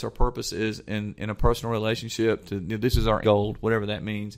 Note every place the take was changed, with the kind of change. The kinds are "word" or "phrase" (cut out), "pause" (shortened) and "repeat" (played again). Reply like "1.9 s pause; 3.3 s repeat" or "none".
3.2 s word